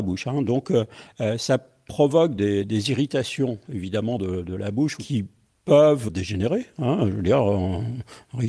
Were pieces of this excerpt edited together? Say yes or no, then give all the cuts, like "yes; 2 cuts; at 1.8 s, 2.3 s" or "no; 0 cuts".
no; 0 cuts